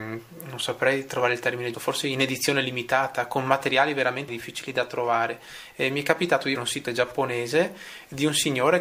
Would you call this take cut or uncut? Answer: cut